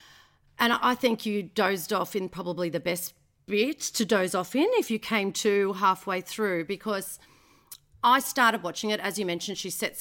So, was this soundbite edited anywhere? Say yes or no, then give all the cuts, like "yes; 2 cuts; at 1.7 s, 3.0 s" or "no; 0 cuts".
no; 0 cuts